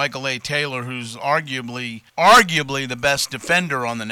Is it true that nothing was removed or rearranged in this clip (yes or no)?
no